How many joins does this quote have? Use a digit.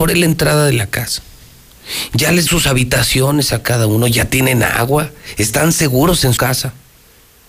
2